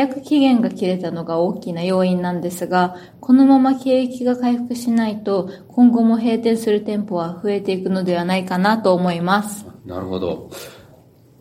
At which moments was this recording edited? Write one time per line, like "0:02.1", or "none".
0:09.8